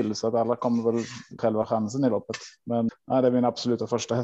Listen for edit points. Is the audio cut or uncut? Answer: cut